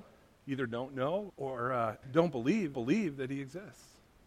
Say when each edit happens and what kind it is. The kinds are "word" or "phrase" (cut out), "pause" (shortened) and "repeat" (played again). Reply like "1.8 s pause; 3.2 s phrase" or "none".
1.3 s word; 2.0 s word; 2.7 s repeat